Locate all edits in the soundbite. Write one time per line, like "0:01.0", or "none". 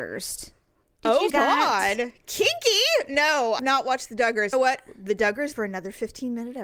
0:01.3
0:03.6
0:04.5
0:05.5